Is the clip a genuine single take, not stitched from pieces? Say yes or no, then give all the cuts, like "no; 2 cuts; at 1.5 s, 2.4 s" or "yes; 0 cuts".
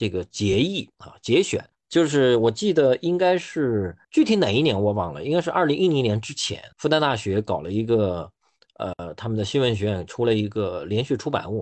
no; 3 cuts; at 1.7 s, 4.0 s, 6.7 s